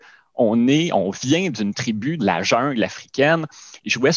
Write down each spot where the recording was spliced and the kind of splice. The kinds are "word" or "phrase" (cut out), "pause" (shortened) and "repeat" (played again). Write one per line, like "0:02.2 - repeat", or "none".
0:02.2 - phrase